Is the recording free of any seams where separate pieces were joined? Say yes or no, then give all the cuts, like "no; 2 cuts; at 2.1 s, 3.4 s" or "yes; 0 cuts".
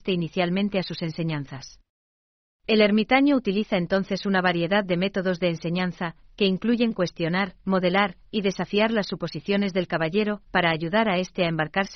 yes; 0 cuts